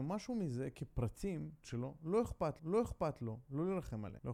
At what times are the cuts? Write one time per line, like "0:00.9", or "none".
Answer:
0:01.6
0:02.6